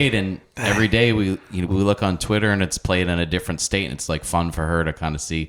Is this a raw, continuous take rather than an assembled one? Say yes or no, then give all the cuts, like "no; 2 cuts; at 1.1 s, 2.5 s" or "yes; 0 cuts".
no; 1 cut; at 1.7 s